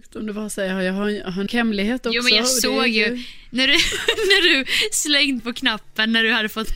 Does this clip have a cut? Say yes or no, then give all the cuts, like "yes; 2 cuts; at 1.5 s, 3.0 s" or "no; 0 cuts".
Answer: yes; 2 cuts; at 1.5 s, 5.4 s